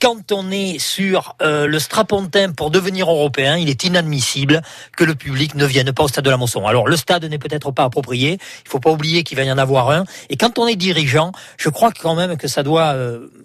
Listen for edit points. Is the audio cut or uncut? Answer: uncut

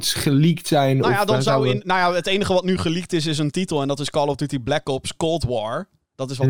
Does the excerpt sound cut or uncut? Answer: uncut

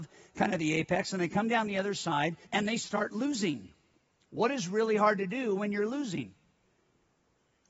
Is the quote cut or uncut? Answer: cut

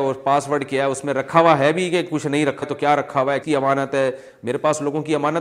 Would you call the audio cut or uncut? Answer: cut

